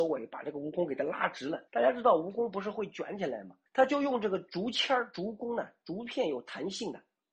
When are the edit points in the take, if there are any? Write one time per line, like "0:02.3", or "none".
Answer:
0:01.7
0:03.7